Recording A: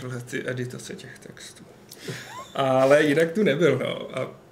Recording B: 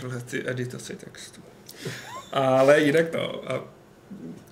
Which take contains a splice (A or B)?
B